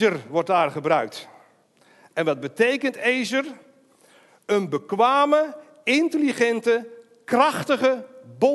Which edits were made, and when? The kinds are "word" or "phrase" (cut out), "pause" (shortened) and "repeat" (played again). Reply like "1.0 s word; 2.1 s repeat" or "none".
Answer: none